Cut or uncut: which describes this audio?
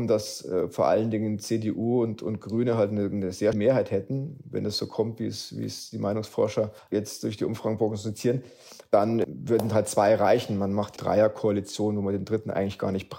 cut